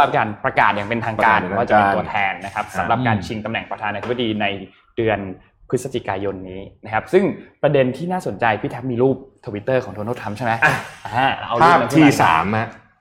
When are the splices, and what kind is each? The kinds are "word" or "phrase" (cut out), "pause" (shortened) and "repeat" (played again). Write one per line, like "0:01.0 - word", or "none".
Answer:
none